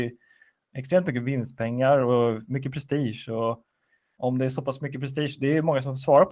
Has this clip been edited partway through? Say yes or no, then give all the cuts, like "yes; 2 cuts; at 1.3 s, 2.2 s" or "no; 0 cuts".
no; 0 cuts